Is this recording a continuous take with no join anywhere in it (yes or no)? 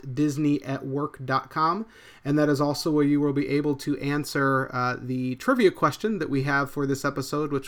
yes